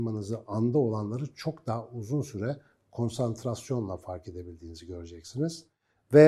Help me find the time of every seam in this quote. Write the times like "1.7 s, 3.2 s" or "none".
none